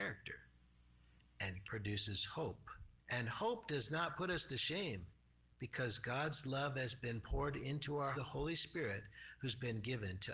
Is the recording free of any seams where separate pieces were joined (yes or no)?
no